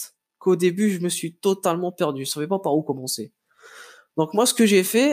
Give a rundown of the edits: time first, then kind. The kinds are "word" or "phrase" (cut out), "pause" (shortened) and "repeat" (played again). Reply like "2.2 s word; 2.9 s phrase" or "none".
none